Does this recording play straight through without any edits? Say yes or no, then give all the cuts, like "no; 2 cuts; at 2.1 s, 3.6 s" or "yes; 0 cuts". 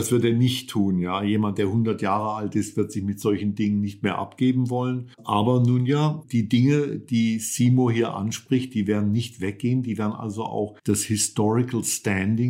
no; 2 cuts; at 5.1 s, 10.8 s